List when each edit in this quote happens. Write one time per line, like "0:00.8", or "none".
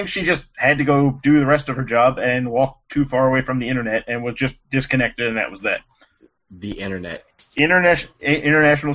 none